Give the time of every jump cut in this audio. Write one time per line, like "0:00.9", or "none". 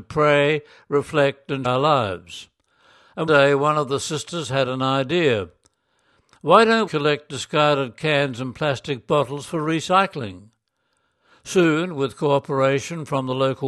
0:01.6
0:03.3
0:06.9

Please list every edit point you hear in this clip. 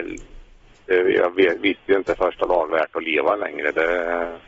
0:02.7

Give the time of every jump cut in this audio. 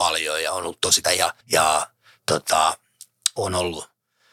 0:01.0
0:01.4

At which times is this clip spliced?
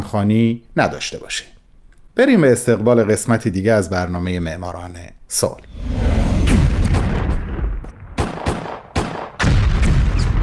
none

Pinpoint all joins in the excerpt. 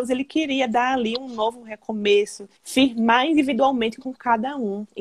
0:02.6

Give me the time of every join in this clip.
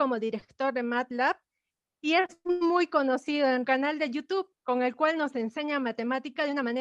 0:03.6
0:04.6

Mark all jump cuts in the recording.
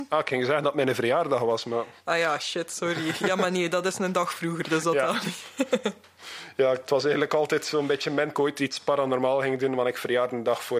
0:08.3

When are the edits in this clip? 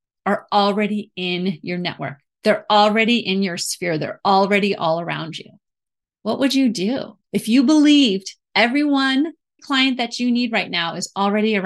0:09.6

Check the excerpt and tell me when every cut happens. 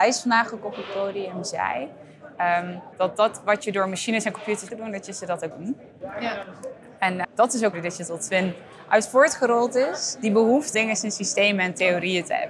0:02.9
0:04.7
0:05.5
0:07.2
0:07.7
0:10.7

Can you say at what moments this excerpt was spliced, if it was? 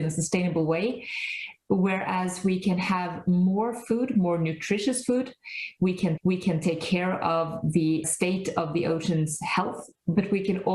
0:06.2
0:08.0

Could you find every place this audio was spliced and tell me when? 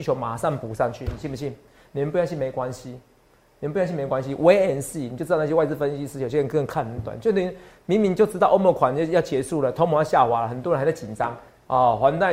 none

